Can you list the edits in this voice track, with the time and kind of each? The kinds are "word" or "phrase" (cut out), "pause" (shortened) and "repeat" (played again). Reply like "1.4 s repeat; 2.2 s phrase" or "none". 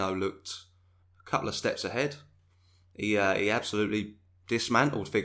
none